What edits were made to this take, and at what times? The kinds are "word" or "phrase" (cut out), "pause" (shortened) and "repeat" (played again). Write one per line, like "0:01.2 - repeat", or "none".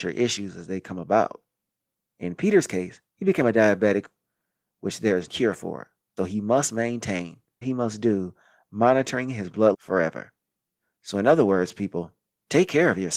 0:03.1 - pause
0:05.3 - word
0:06.2 - word
0:07.6 - phrase
0:09.7 - word